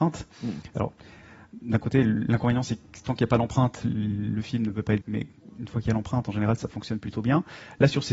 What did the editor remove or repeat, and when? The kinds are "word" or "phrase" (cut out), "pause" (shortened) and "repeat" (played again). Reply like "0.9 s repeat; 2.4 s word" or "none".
5.0 s word